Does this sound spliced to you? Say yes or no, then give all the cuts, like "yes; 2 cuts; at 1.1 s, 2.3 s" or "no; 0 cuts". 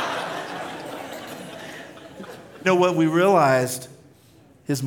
yes; 1 cut; at 2.6 s